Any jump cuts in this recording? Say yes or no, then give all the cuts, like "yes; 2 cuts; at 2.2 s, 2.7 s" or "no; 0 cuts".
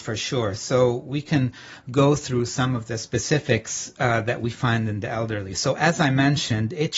no; 0 cuts